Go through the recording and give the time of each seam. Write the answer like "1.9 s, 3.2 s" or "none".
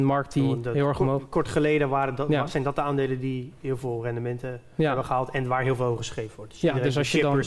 none